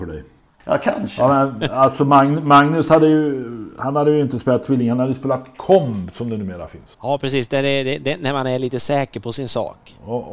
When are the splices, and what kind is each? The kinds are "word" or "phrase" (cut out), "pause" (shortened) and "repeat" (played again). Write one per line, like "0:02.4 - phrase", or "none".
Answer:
0:06.9 - pause